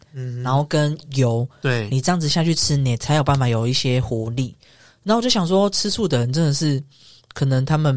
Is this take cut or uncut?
uncut